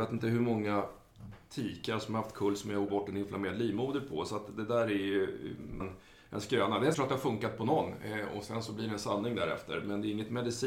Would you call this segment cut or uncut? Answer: cut